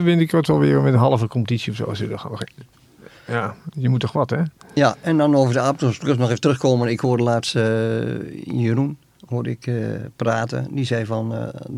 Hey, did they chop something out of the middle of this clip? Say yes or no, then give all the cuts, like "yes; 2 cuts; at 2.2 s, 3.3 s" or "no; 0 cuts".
no; 0 cuts